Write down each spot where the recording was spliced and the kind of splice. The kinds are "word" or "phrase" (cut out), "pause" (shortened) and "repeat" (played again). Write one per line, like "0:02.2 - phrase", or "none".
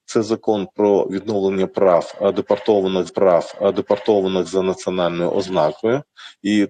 0:03.1 - repeat